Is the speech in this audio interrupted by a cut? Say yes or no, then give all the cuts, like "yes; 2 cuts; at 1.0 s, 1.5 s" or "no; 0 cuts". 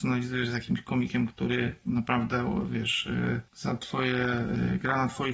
yes; 1 cut; at 3.5 s